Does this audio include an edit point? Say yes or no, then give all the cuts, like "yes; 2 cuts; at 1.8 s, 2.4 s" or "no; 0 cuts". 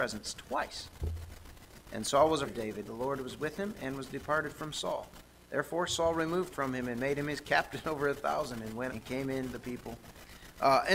yes; 5 cuts; at 2.4 s, 2.9 s, 6.5 s, 8.9 s, 9.5 s